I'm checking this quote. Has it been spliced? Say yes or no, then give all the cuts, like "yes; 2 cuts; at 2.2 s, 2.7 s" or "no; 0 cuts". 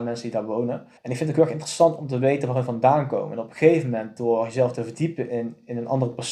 yes; 1 cut; at 1.0 s